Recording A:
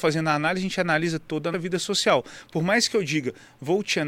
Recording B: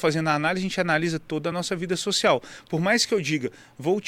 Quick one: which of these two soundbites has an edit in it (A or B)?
A